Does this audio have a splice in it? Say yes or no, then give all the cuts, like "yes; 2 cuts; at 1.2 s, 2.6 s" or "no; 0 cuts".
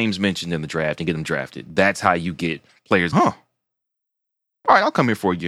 yes; 1 cut; at 3.1 s